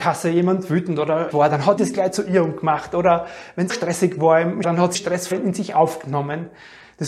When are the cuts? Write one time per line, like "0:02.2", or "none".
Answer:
0:01.3
0:01.8
0:03.7
0:04.6
0:04.9
0:05.3